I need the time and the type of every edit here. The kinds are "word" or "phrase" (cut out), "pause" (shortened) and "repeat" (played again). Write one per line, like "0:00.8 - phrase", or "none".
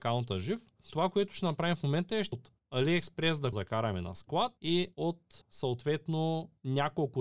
0:02.3 - word
0:03.5 - phrase
0:04.6 - pause
0:05.4 - pause